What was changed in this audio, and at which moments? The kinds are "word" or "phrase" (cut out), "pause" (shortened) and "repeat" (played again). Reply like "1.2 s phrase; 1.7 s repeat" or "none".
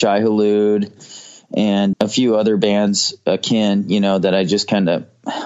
1.9 s word